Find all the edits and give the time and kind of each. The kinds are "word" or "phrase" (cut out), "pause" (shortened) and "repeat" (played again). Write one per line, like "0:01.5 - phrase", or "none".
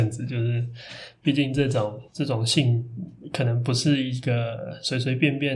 0:02.1 - pause